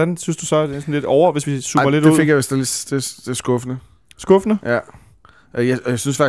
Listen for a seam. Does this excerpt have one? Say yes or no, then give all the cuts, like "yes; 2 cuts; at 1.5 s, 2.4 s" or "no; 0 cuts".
no; 0 cuts